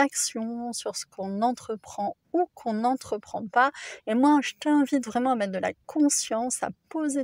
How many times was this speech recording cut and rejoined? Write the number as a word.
zero